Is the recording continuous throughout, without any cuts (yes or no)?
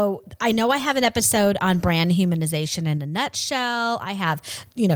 yes